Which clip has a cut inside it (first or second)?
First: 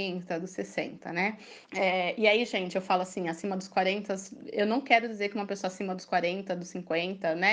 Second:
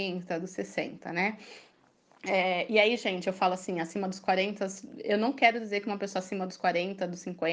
first